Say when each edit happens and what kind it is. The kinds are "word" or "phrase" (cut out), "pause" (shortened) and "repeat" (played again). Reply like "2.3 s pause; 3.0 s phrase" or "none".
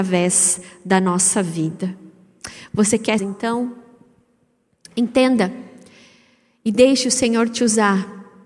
3.2 s phrase